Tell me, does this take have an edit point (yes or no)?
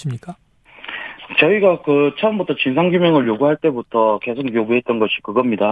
no